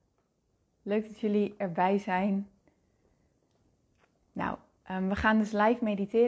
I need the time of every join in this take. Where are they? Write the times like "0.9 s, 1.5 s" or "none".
none